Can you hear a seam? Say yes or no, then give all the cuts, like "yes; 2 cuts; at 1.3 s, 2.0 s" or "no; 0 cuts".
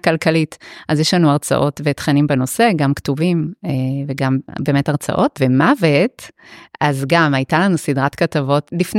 no; 0 cuts